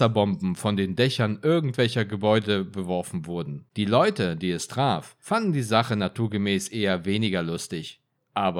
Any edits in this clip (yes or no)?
yes